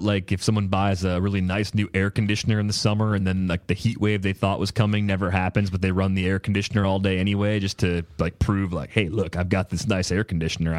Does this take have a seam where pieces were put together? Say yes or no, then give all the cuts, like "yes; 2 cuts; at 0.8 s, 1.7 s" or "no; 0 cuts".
no; 0 cuts